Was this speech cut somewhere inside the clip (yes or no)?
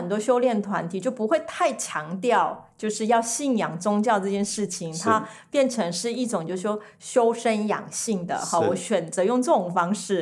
no